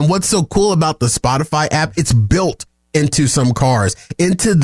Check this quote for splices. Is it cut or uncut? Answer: uncut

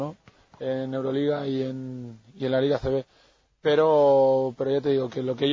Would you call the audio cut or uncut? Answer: uncut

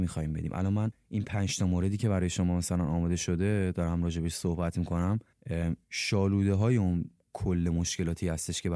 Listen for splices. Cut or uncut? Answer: cut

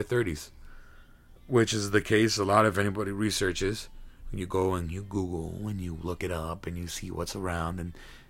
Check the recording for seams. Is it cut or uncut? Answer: cut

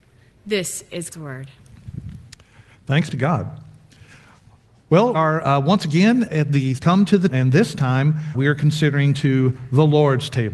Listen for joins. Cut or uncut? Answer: cut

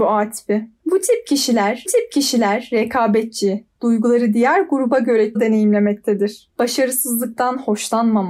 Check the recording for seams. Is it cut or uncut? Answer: cut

